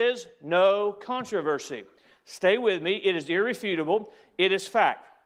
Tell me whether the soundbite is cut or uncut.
uncut